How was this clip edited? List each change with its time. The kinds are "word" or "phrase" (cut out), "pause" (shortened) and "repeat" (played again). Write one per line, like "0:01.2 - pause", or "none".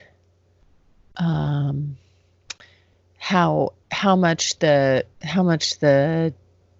0:03.8 - pause
0:05.1 - pause